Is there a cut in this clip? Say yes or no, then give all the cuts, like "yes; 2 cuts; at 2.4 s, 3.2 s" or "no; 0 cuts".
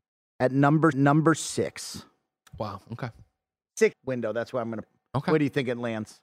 yes; 3 cuts; at 0.9 s, 3.9 s, 4.8 s